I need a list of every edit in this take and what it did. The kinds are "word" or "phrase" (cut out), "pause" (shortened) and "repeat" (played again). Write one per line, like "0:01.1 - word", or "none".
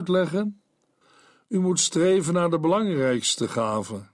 none